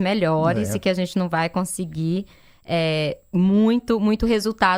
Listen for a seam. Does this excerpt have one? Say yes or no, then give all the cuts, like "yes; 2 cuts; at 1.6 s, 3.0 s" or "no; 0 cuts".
no; 0 cuts